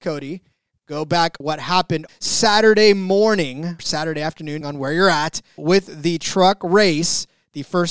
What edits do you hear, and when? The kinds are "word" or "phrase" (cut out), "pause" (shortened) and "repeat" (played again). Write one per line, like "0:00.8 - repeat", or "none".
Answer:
0:01.4 - word
0:02.1 - word
0:03.8 - word
0:04.6 - word
0:05.6 - word